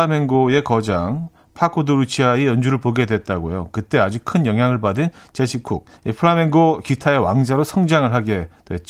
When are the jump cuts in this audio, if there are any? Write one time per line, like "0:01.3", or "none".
0:06.0